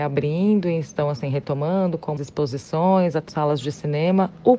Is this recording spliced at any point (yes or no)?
yes